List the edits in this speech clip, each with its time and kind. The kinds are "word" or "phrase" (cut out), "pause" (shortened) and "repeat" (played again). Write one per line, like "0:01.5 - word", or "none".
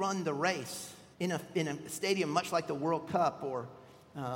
0:01.1 - pause

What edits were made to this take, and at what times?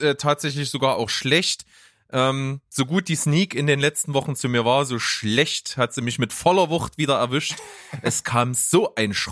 none

